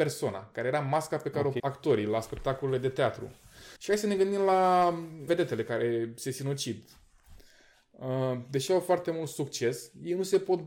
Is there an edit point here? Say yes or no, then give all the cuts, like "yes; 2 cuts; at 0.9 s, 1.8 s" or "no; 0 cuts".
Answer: yes; 3 cuts; at 1.6 s, 3.8 s, 5.3 s